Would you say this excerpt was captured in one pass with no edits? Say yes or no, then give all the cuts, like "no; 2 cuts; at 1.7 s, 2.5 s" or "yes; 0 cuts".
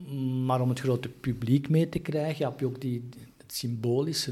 yes; 0 cuts